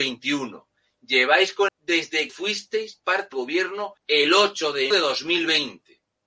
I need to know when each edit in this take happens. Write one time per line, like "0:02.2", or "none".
0:01.7
0:02.3
0:03.3
0:04.0
0:04.9